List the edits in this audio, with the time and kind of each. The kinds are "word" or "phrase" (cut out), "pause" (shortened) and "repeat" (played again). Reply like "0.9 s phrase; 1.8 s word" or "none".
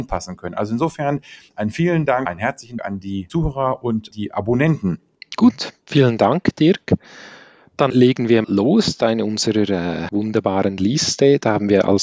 2.3 s word; 2.8 s word; 4.1 s word; 7.9 s word; 8.4 s word; 10.1 s word